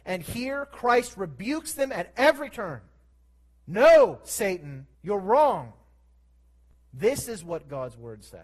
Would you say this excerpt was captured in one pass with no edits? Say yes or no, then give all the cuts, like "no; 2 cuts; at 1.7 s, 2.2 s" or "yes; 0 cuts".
no; 2 cuts; at 3.1 s, 4.9 s